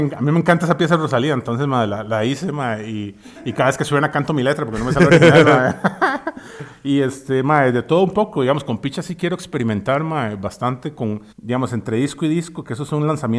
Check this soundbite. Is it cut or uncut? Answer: cut